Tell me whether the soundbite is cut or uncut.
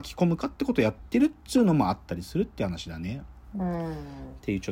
cut